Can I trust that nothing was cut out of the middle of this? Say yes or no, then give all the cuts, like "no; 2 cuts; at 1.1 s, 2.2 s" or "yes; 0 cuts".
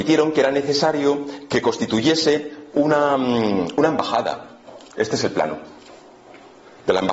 yes; 0 cuts